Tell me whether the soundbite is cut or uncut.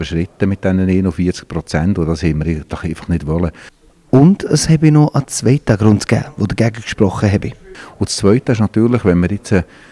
uncut